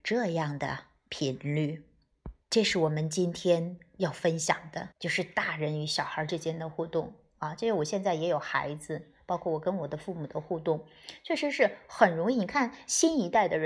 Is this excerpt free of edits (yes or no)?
no